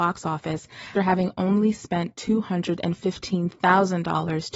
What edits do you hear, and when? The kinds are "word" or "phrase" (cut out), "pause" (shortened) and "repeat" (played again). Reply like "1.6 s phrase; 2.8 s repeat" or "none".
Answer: 1.0 s word